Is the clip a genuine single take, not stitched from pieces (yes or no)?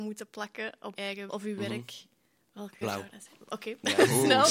no